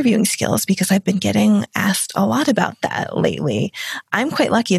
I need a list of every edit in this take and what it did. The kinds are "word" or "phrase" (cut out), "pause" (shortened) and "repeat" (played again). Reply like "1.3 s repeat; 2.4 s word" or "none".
none